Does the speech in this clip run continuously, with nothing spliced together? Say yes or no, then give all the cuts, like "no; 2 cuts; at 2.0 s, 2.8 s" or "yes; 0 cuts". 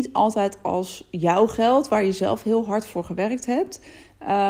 yes; 0 cuts